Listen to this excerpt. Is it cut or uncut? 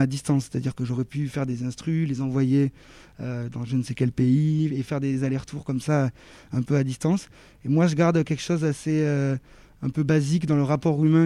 uncut